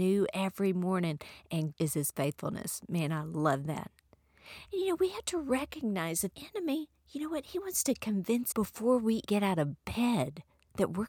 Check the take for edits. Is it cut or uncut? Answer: cut